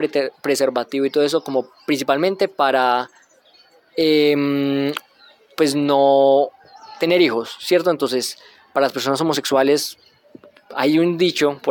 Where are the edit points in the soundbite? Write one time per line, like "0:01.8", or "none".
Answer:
none